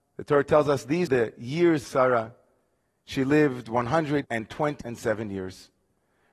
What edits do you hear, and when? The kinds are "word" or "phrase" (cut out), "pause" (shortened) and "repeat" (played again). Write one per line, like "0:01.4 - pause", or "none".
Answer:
0:01.1 - word
0:01.8 - word
0:04.2 - word
0:04.8 - word